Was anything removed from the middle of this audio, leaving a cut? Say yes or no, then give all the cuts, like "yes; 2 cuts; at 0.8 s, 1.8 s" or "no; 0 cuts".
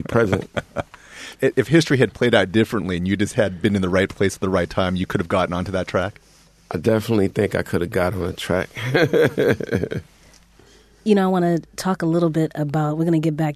yes; 1 cut; at 1.4 s